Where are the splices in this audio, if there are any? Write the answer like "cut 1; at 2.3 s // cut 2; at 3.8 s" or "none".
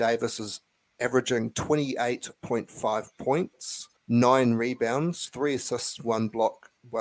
cut 1; at 4.0 s